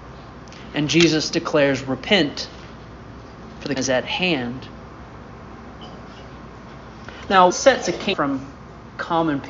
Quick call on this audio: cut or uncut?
cut